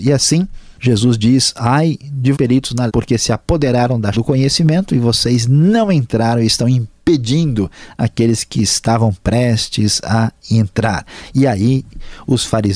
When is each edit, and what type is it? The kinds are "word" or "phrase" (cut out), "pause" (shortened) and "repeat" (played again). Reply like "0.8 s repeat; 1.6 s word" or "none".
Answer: 2.3 s word; 2.9 s word; 4.1 s word